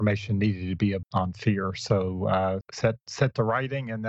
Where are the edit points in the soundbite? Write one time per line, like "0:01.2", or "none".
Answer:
0:01.0
0:02.6